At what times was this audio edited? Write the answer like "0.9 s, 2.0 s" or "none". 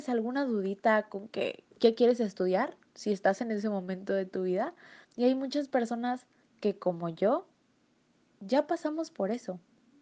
1.7 s, 5.0 s, 6.4 s